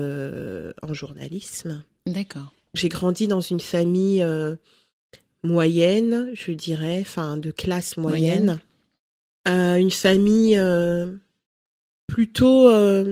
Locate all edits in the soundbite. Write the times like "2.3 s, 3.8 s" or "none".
none